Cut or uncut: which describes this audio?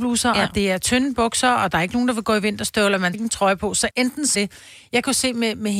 cut